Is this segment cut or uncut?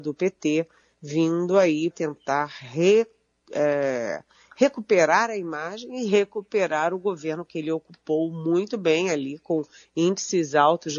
cut